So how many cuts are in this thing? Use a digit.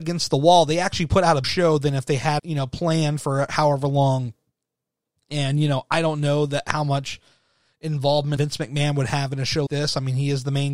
4